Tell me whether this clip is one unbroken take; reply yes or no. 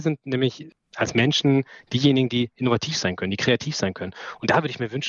yes